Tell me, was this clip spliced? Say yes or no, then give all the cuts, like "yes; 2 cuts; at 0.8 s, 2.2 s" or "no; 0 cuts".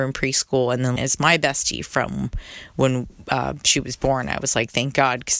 yes; 1 cut; at 1.0 s